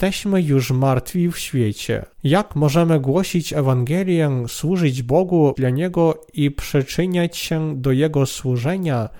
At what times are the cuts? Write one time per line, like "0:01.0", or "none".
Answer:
0:02.1
0:05.5